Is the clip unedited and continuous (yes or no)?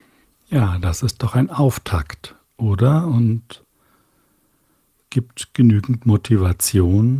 yes